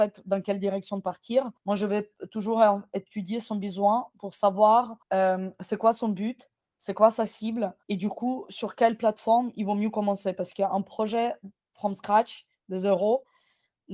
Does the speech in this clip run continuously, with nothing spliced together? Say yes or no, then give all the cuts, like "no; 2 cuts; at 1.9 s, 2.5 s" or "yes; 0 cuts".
no; 3 cuts; at 1.6 s, 5.0 s, 7.8 s